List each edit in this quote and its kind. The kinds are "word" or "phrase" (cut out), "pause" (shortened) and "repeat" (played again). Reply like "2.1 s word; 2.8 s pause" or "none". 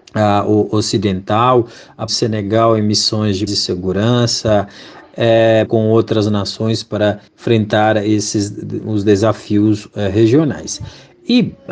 2.1 s phrase; 3.5 s word; 5.7 s word; 7.3 s pause